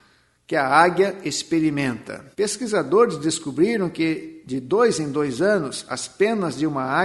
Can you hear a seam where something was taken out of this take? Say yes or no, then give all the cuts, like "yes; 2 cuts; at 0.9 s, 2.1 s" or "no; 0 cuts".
yes; 1 cut; at 2.3 s